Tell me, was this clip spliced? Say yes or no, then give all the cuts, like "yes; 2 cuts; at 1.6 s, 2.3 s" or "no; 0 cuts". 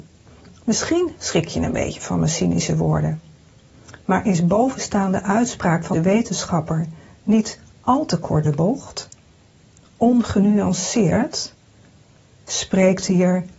yes; 2 cuts; at 5.9 s, 8.4 s